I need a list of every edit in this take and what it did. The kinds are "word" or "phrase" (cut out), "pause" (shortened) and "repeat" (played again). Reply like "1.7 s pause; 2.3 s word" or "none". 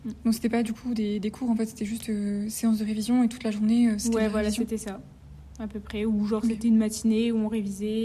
none